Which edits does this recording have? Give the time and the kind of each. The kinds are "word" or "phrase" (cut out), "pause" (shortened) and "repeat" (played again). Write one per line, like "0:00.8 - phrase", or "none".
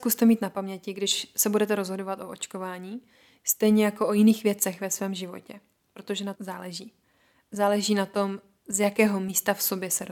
0:06.3 - word